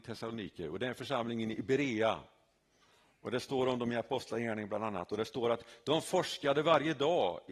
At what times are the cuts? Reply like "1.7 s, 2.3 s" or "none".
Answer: none